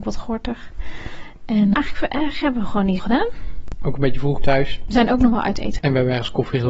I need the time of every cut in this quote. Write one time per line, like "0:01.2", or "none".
0:01.7
0:03.0
0:04.4